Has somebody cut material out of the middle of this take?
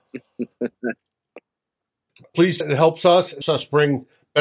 yes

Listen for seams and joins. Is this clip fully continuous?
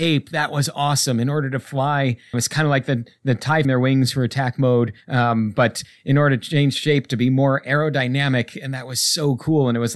no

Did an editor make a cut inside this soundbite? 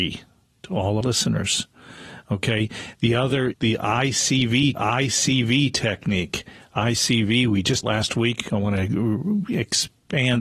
yes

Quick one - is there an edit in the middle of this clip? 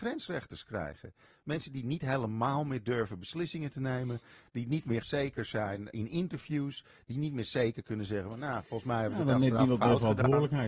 yes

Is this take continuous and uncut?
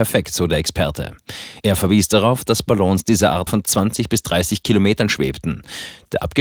no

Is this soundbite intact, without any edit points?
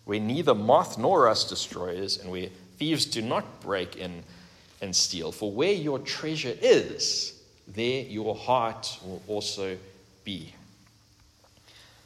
yes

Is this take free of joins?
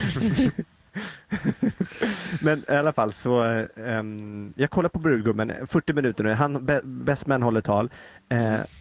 yes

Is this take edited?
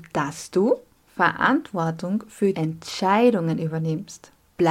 yes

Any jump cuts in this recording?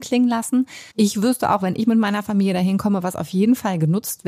yes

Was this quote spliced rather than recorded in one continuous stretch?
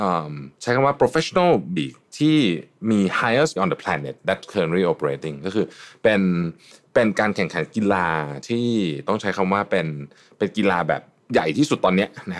yes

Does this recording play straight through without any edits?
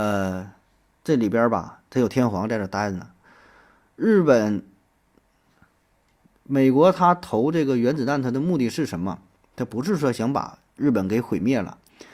yes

